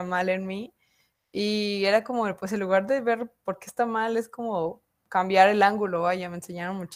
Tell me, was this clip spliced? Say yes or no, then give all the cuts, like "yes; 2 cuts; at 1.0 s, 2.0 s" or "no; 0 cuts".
no; 0 cuts